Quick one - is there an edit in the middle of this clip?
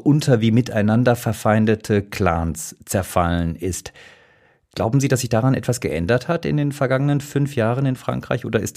no; 0 cuts

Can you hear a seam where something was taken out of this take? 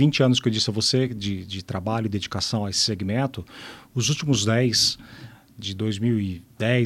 no; 0 cuts

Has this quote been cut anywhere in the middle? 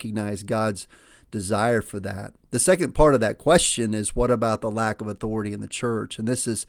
no; 0 cuts

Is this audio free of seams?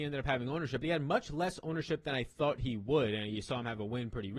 yes; 0 cuts

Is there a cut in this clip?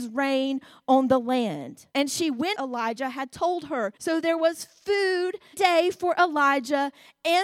yes; 4 cuts; at 1.9 s, 2.5 s, 4.0 s, 5.5 s

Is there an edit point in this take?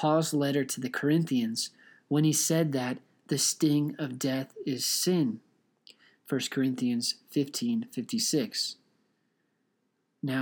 no; 0 cuts

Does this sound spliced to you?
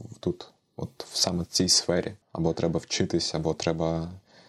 no; 0 cuts

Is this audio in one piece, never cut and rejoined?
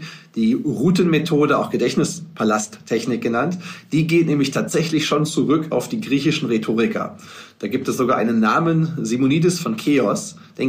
yes; 0 cuts

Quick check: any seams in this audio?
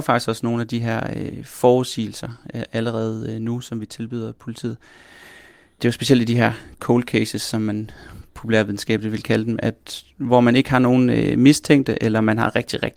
no; 0 cuts

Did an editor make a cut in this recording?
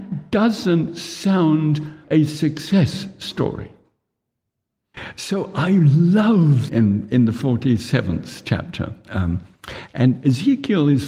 yes; 2 cuts; at 2.0 s, 6.7 s

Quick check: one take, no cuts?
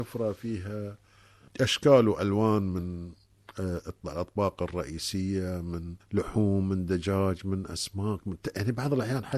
yes; 0 cuts

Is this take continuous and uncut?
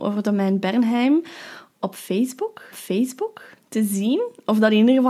no; 2 cuts; at 1.7 s, 2.7 s

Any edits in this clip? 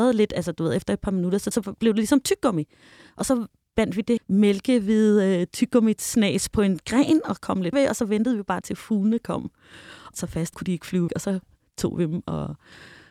yes; 7 cuts; at 1.5 s, 4.2 s, 7.7 s, 8.6 s, 10.1 s, 10.5 s, 11.1 s

